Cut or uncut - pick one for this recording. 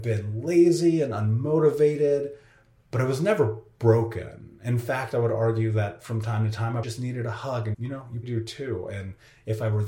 cut